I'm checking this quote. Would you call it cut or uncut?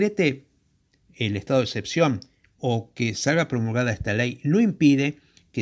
uncut